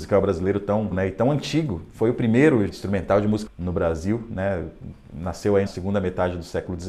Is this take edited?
yes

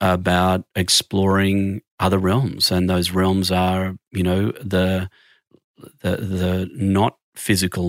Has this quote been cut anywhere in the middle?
no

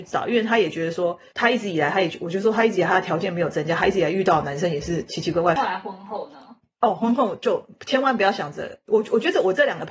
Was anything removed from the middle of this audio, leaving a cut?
no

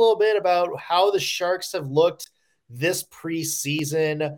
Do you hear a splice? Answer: no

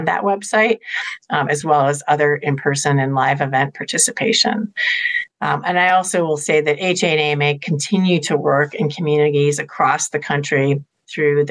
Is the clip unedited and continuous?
yes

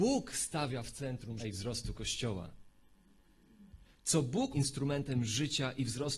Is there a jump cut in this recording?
yes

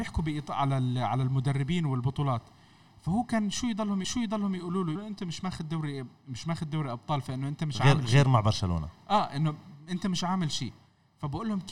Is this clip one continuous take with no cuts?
no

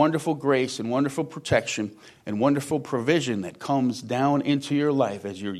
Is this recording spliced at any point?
no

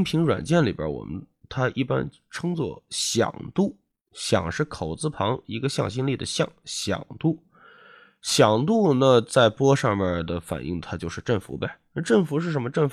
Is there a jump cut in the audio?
no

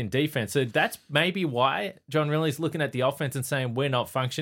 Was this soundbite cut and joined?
no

